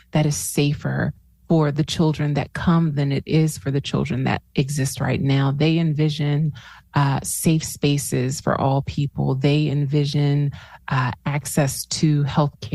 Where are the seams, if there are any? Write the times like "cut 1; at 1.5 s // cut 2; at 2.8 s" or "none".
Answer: none